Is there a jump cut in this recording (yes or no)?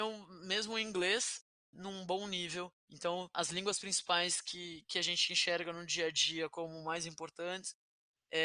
yes